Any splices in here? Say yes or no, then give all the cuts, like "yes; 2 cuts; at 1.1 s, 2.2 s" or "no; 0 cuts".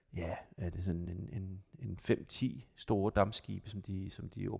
no; 0 cuts